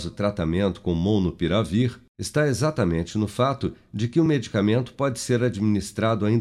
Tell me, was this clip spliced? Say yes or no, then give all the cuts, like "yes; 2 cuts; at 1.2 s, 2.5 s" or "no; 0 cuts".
no; 0 cuts